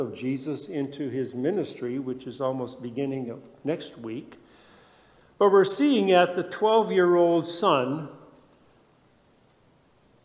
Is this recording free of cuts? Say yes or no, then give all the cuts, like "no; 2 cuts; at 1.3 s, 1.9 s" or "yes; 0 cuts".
yes; 0 cuts